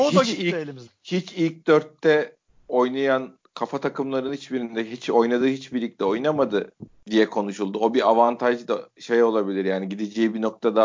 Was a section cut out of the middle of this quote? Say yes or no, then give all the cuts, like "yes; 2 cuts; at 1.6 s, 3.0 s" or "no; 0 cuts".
no; 0 cuts